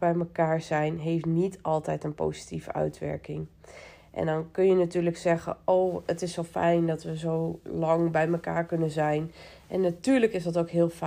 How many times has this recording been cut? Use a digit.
0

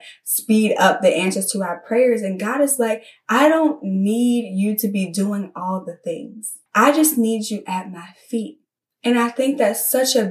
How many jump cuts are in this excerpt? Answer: 2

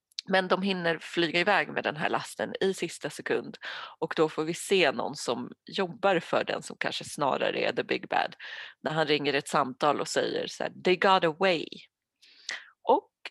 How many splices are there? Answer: 0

